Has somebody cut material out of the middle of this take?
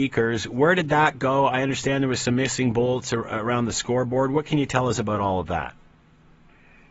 no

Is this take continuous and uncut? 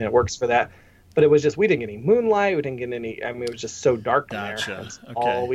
no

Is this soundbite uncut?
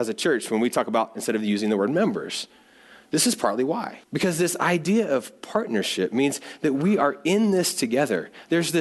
no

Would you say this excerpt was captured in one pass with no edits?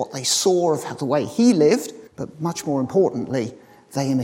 no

